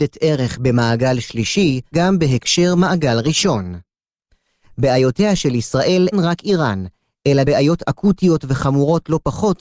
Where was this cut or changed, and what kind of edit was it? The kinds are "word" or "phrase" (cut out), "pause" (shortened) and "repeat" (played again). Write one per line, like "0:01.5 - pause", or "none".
0:01.9 - word
0:06.1 - word
0:07.4 - word